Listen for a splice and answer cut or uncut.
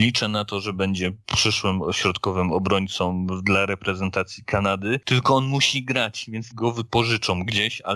cut